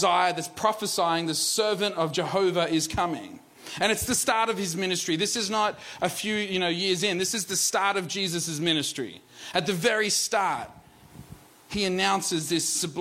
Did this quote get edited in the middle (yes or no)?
no